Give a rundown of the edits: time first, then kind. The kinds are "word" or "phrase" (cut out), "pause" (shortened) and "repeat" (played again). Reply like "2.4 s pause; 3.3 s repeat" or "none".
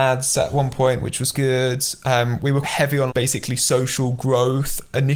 1.3 s word; 2.6 s word; 3.1 s word